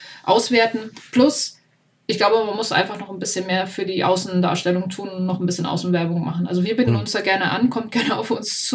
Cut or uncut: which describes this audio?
uncut